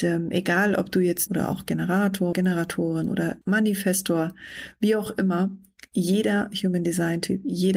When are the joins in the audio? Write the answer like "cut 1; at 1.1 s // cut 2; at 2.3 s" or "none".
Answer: cut 1; at 1.3 s // cut 2; at 2.3 s // cut 3; at 3.4 s